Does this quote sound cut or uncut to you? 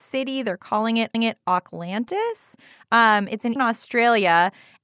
cut